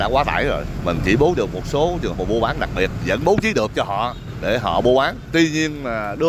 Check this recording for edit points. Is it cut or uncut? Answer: cut